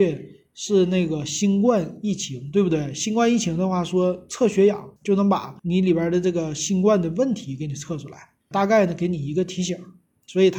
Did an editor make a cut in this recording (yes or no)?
yes